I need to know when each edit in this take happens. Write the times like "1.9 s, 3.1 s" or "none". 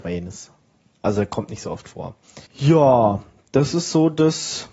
2.5 s